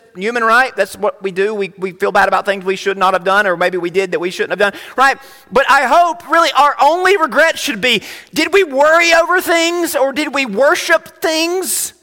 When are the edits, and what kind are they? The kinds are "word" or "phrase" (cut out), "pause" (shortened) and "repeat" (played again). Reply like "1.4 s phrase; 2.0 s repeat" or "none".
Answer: none